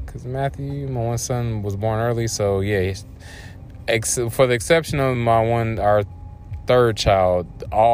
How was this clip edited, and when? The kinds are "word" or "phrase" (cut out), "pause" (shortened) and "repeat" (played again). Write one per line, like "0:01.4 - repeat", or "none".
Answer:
none